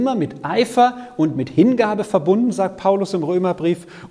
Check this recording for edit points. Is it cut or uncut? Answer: uncut